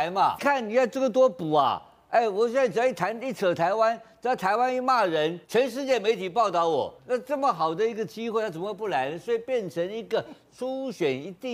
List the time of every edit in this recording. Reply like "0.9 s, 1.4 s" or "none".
5.4 s, 7.0 s